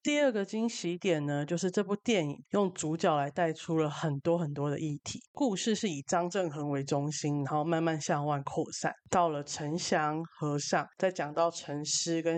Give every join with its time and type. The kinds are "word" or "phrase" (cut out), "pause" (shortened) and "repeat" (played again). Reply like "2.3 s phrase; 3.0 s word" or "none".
2.5 s pause; 5.3 s pause